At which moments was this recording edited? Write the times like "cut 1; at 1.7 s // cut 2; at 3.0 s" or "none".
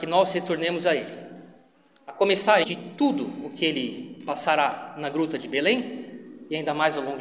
cut 1; at 2.6 s